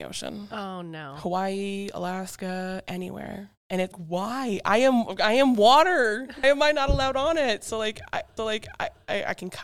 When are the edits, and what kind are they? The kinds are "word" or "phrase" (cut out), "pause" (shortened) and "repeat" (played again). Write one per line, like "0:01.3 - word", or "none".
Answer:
0:03.6 - pause
0:03.9 - word
0:06.4 - word
0:08.4 - repeat